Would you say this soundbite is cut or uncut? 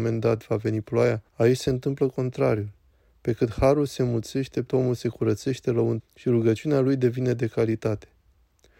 cut